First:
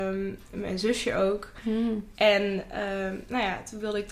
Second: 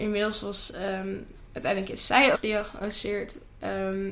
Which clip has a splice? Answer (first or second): second